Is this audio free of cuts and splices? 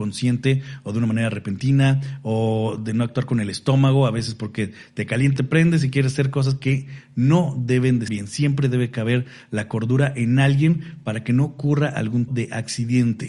no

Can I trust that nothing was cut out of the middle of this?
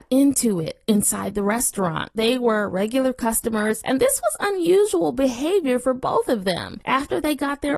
yes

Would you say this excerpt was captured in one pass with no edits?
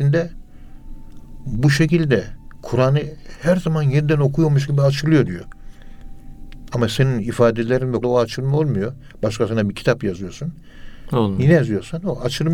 no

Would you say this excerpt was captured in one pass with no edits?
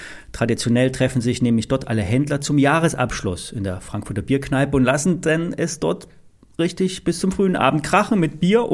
yes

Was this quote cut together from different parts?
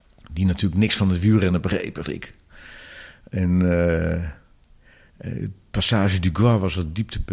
yes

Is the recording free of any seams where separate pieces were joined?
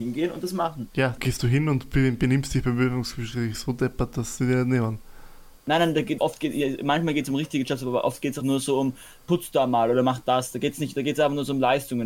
no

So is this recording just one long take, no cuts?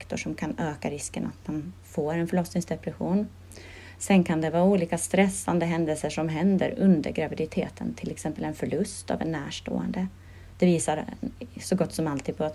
yes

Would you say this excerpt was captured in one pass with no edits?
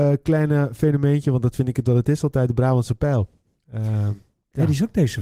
yes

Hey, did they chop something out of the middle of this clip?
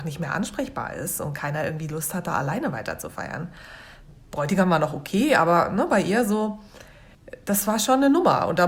no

